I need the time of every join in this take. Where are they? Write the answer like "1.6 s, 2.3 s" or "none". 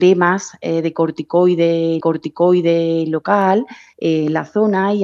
2.0 s